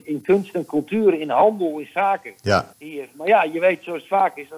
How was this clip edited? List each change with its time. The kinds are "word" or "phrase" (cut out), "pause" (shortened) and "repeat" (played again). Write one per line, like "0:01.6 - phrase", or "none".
0:02.7 - pause